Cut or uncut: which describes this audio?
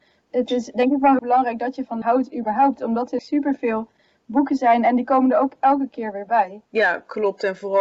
cut